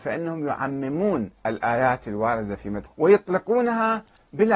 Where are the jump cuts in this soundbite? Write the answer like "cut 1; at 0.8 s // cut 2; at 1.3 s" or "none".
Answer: cut 1; at 2.9 s